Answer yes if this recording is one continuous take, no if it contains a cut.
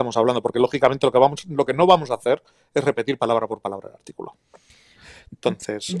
yes